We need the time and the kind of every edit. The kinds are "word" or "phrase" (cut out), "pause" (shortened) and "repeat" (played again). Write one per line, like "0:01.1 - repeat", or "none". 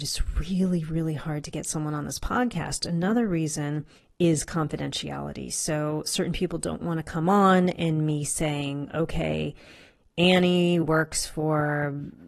none